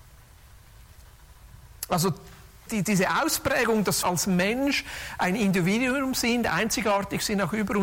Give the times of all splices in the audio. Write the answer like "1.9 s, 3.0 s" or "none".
2.7 s, 4.0 s